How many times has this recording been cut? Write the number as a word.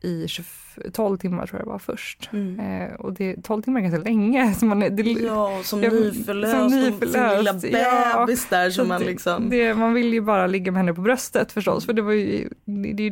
zero